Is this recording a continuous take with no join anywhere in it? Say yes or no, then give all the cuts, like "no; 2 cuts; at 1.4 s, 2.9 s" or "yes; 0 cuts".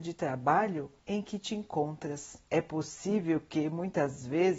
no; 2 cuts; at 1.0 s, 2.4 s